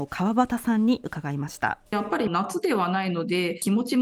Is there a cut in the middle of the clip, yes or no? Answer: yes